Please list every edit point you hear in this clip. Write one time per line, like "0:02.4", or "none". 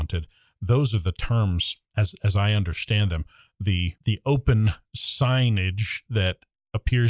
none